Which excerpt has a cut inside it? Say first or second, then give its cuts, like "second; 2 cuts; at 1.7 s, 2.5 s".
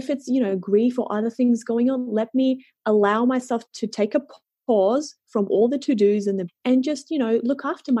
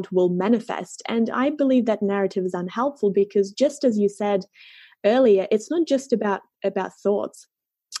first; 1 cut; at 6.5 s